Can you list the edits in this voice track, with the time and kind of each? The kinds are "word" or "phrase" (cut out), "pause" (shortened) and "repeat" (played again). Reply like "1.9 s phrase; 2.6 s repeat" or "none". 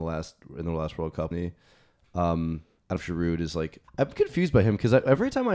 1.3 s word; 3.0 s word; 3.9 s pause